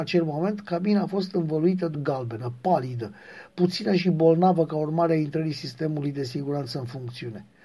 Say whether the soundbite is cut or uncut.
cut